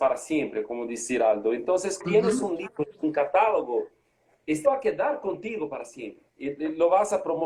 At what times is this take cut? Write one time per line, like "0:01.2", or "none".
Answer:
0:02.0
0:04.6
0:06.3